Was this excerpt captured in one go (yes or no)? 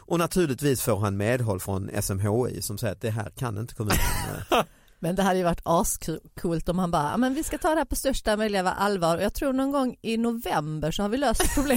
yes